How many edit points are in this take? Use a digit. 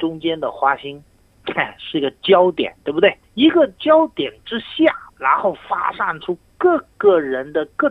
2